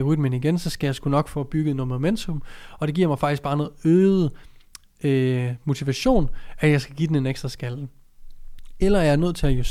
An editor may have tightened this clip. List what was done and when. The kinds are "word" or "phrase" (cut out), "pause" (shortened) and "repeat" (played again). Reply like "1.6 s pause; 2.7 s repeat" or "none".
none